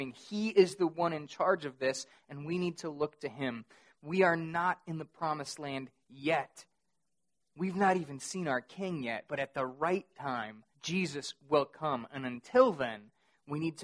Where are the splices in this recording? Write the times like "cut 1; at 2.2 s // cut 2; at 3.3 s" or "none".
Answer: cut 1; at 10.7 s